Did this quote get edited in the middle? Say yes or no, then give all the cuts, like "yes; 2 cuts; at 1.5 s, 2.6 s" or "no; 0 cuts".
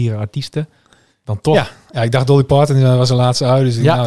no; 0 cuts